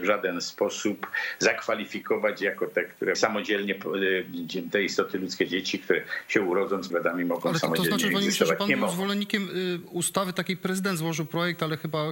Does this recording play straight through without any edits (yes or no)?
no